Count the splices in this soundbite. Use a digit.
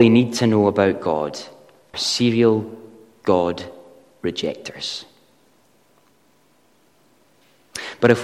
1